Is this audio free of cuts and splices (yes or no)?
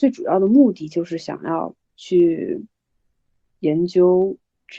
no